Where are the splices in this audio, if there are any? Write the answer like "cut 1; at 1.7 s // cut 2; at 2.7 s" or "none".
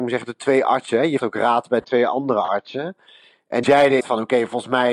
cut 1; at 1.2 s // cut 2; at 3.6 s // cut 3; at 4.0 s